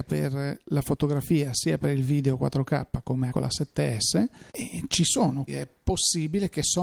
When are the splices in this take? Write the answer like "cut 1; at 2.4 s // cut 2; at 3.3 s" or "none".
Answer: cut 1; at 3.3 s // cut 2; at 4.5 s // cut 3; at 5.5 s